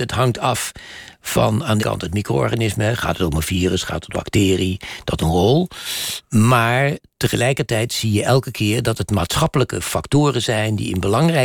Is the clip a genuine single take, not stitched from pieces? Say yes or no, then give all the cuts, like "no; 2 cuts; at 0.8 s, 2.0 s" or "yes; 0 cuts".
no; 3 cuts; at 1.8 s, 4.1 s, 5.2 s